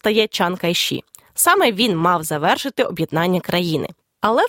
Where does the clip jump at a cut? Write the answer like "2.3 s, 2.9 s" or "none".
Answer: none